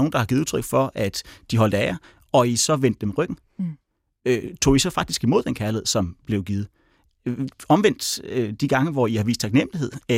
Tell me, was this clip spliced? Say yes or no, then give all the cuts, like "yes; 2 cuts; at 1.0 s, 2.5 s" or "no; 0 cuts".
no; 0 cuts